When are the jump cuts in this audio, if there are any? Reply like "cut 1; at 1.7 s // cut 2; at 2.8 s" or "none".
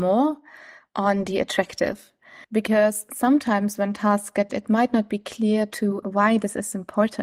cut 1; at 2.4 s // cut 2; at 4.5 s // cut 3; at 6.0 s